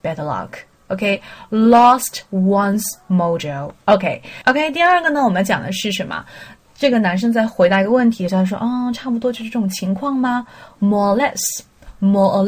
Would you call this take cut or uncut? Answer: cut